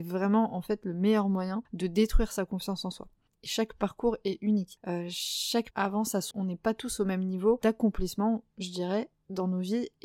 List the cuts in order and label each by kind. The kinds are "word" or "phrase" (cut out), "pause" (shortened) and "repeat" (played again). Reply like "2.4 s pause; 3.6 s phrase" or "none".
3.5 s phrase; 5.7 s word; 6.3 s phrase